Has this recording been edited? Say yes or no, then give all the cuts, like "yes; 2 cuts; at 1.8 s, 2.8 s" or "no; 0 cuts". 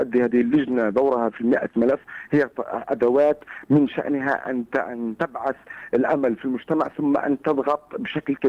no; 0 cuts